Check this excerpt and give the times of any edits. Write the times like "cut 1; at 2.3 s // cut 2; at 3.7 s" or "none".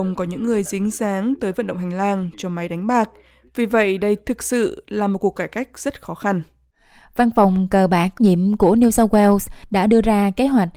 cut 1; at 8.2 s